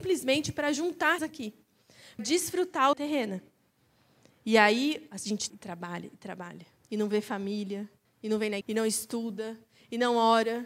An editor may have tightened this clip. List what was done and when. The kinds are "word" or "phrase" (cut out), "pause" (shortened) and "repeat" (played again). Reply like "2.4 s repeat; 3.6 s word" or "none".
1.2 s word; 2.2 s word; 2.9 s phrase; 5.5 s word; 6.8 s pause; 8.0 s pause; 8.6 s word